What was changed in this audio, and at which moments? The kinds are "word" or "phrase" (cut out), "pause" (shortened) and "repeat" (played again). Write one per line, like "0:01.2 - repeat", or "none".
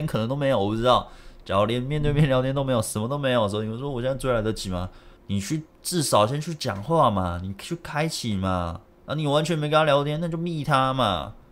0:05.2 - pause

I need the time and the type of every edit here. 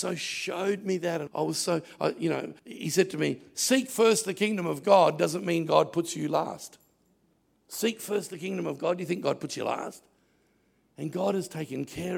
0:01.3 - word
0:02.6 - pause
0:07.3 - pause

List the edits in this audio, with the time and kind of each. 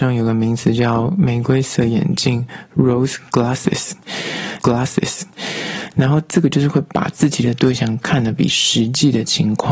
0:04.6 - repeat

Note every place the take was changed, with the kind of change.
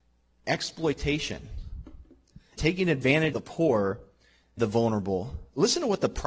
0:02.6 - word
0:03.3 - word
0:04.6 - word

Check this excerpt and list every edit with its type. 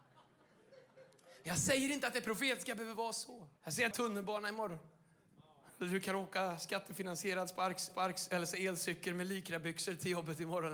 0:03.6 - pause
0:03.9 - phrase
0:07.9 - repeat

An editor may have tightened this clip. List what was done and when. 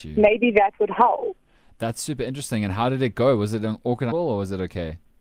0:04.1 - word

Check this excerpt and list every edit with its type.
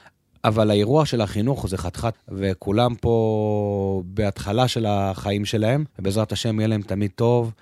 0:02.1 - word
0:05.9 - pause

